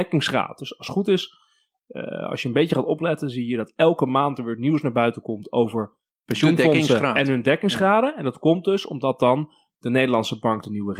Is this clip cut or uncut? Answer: uncut